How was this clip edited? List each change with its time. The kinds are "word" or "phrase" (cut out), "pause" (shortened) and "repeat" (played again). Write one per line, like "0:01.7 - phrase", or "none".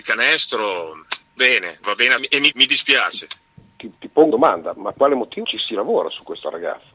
0:01.4 - word
0:01.8 - word
0:02.2 - word
0:02.5 - word
0:04.3 - word
0:04.9 - word
0:05.4 - word